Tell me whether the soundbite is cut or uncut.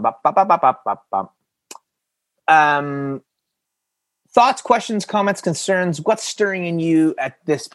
uncut